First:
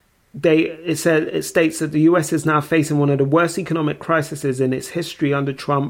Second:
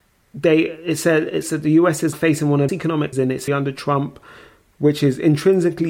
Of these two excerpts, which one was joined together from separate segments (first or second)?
second